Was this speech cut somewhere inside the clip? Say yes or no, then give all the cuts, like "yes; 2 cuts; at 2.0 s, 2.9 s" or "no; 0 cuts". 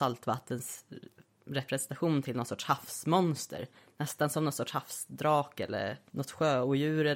no; 0 cuts